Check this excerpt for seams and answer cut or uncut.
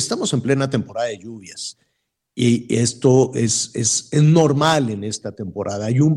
uncut